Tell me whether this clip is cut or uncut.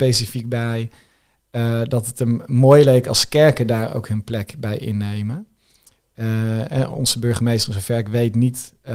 uncut